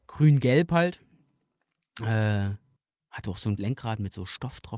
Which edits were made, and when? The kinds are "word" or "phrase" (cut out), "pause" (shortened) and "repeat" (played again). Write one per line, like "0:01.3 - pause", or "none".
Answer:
0:02.8 - pause
0:03.6 - word